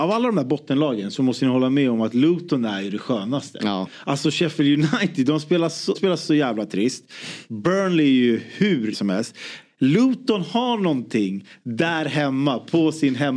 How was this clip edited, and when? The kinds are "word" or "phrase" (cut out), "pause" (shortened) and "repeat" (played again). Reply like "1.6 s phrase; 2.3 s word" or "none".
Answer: 5.9 s word; 8.9 s word